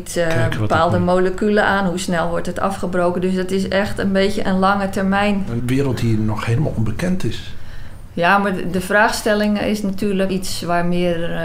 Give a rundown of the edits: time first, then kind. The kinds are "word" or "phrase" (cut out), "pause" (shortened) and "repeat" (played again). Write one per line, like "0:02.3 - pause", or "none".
0:05.6 - word
0:08.7 - word
0:10.3 - word